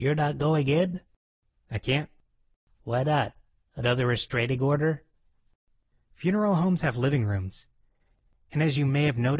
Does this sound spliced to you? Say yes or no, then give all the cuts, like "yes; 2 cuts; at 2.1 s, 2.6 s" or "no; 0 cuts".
no; 0 cuts